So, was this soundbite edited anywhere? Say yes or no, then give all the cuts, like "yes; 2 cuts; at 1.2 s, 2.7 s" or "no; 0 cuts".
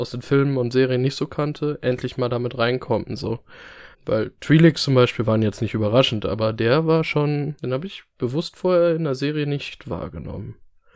yes; 2 cuts; at 3.9 s, 7.6 s